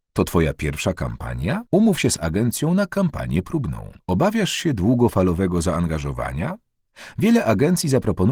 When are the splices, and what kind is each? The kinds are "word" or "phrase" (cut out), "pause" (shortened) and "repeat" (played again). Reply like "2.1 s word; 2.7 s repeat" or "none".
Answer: 1.7 s pause; 4.0 s pause

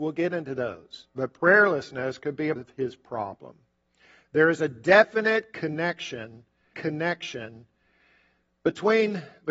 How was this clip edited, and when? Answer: 1.1 s pause; 2.6 s word; 6.7 s repeat

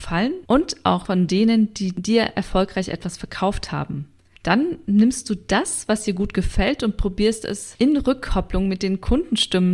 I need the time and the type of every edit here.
none

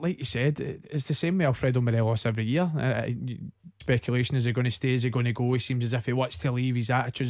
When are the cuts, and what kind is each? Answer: 3.8 s phrase

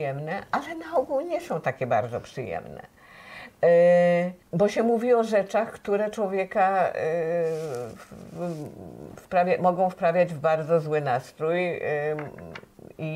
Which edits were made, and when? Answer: 4.4 s pause

